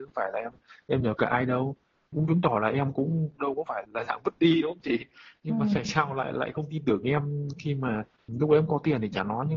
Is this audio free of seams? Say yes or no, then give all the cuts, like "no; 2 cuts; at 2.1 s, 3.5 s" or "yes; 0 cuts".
no; 1 cut; at 3.8 s